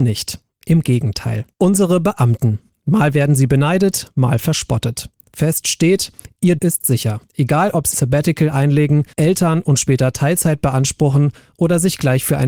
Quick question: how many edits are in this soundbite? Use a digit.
5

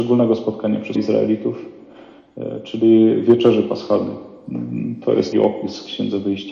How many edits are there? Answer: 2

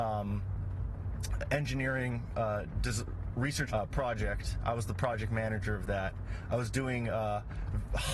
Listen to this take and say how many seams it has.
1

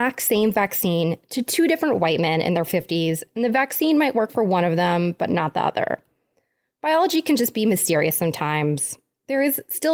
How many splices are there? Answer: 0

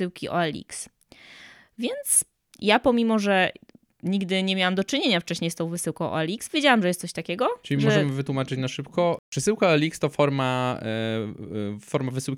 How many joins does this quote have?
0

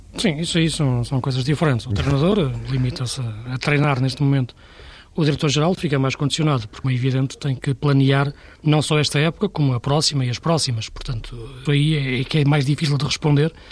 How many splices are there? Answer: 3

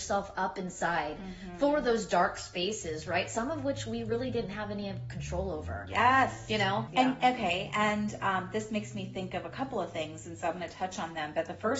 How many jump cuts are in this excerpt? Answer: 1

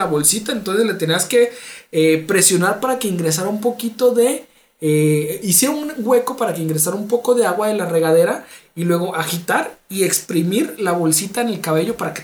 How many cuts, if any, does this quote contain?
0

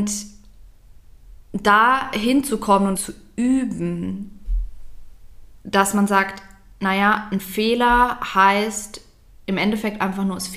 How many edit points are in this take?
2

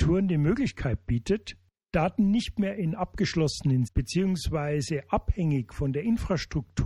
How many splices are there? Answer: 1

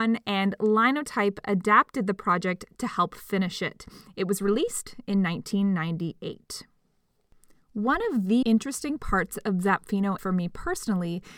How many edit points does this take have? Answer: 2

